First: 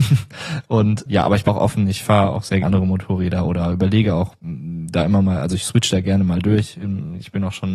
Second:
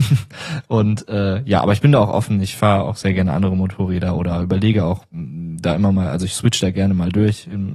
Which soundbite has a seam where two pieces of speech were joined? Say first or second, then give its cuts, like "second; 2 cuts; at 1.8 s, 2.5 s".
first; 3 cuts; at 1.1 s, 1.5 s, 2.6 s